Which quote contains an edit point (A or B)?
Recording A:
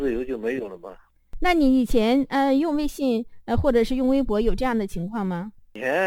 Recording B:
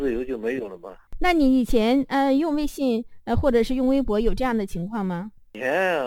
B